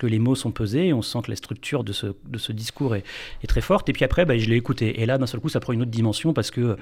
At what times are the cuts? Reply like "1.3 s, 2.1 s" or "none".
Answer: 1.8 s